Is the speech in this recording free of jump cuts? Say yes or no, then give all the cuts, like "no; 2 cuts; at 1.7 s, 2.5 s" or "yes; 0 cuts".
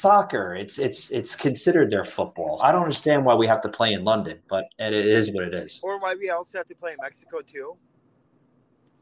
no; 1 cut; at 2.6 s